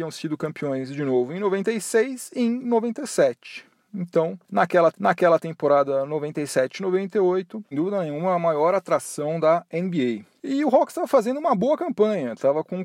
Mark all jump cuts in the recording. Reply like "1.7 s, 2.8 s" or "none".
4.9 s, 7.7 s